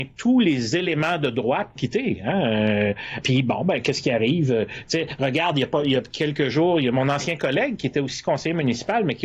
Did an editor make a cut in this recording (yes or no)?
yes